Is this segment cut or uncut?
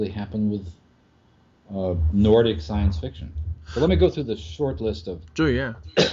uncut